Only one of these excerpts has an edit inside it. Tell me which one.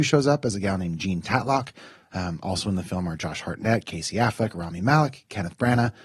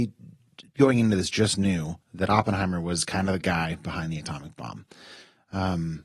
second; 1 cut; at 2.0 s

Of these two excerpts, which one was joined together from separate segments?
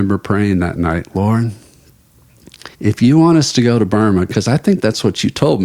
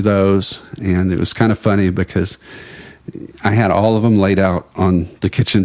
first; 1 cut; at 2.7 s

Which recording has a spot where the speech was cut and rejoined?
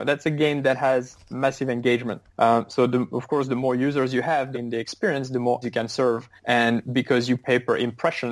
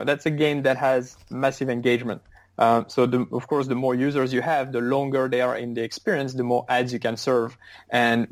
first; 4 cuts; at 2.3 s, 4.5 s, 5.6 s, 6.4 s

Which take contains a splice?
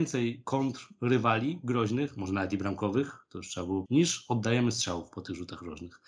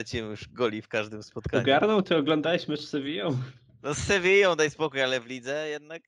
first; 1 cut; at 3.9 s

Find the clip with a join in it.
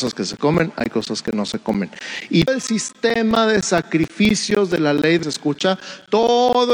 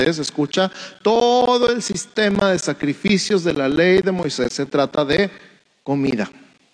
first; 2 cuts; at 2.5 s, 5.2 s

